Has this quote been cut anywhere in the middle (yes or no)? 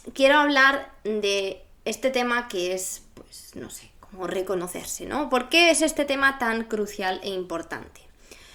no